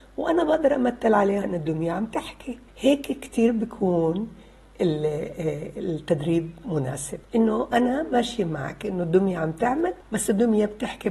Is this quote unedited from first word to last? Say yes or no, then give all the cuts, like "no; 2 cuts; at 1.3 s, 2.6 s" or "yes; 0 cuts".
no; 4 cuts; at 1.4 s, 2.7 s, 7.2 s, 10.0 s